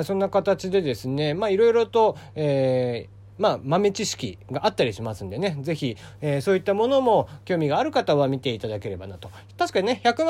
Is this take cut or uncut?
uncut